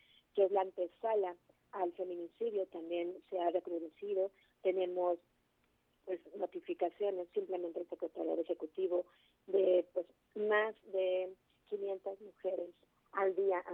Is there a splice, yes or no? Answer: no